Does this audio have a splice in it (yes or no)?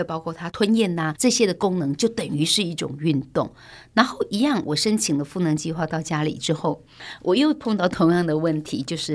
yes